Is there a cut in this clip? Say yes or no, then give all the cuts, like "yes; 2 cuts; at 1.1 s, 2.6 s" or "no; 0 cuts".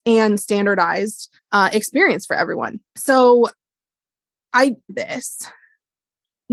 yes; 3 cuts; at 1.4 s, 2.9 s, 4.9 s